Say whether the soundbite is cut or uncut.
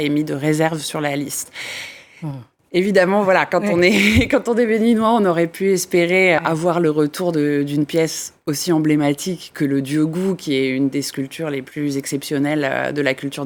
cut